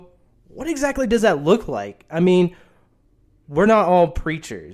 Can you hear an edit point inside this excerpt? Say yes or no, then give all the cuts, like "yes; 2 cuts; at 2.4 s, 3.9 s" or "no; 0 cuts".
no; 0 cuts